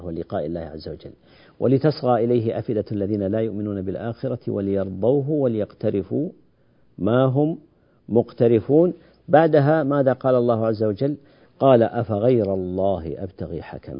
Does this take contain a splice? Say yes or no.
no